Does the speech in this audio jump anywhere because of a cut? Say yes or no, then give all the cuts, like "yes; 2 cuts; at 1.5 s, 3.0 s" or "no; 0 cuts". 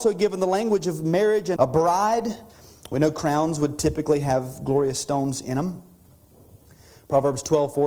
yes; 1 cut; at 1.6 s